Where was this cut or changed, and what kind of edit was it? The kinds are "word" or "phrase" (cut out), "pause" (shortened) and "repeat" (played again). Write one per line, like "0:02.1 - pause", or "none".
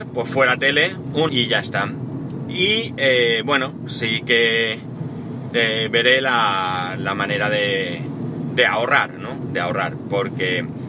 0:01.3 - phrase